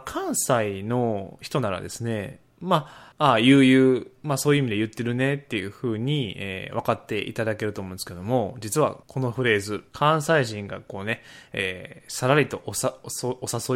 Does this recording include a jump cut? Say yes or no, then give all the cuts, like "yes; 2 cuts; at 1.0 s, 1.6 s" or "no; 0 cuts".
yes; 3 cuts; at 3.1 s, 9.0 s, 9.9 s